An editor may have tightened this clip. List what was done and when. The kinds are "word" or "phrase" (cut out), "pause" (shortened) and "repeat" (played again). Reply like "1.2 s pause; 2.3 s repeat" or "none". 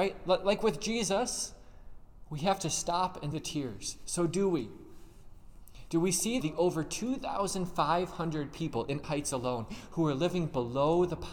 3.3 s word; 6.4 s phrase; 9.0 s word